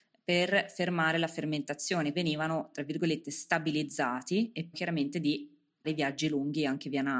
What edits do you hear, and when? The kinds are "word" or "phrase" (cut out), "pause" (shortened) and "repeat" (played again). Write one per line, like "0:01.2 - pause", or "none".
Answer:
0:02.1 - word
0:04.7 - word
0:05.8 - word

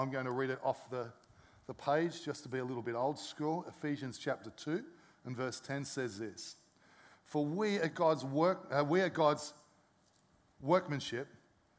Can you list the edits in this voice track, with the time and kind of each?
none

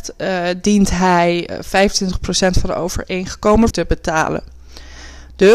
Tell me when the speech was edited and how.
0:03.7 - word

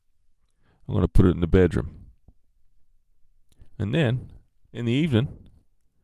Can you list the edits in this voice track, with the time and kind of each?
none

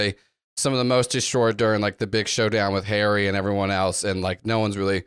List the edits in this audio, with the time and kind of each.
none

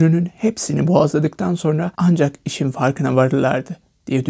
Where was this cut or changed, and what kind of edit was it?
0:01.9 - pause

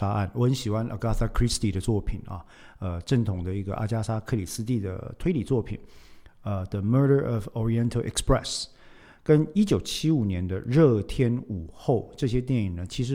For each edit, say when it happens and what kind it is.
none

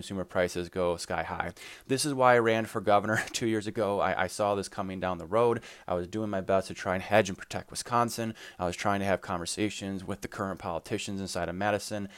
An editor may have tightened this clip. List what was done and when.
none

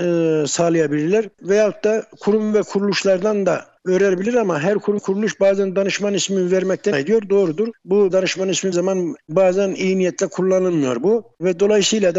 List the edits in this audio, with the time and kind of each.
0:05.0 - word
0:06.9 - word
0:08.1 - word
0:08.7 - word

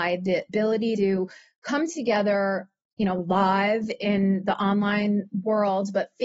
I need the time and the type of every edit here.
0:01.0 - word

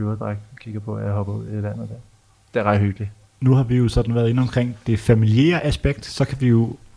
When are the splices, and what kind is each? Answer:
none

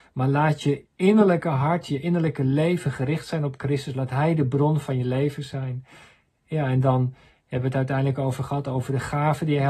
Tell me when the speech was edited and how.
none

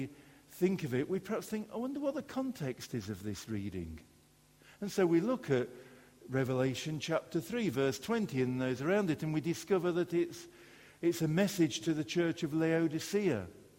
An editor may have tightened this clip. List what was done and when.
none

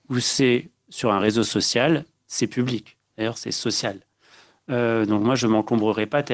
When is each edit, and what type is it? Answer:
none

